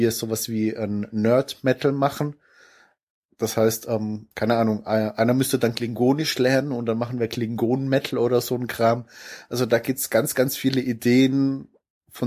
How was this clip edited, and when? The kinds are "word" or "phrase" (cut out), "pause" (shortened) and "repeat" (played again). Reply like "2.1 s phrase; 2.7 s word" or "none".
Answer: 4.3 s pause